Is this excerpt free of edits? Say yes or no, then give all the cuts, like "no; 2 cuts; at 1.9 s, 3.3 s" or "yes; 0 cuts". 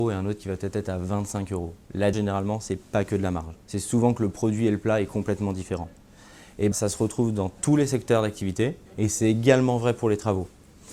no; 4 cuts; at 2.1 s, 3.6 s, 6.7 s, 8.9 s